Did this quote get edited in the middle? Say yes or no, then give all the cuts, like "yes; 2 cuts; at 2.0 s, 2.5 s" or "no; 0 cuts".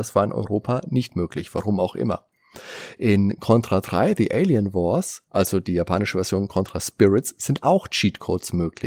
yes; 1 cut; at 5.3 s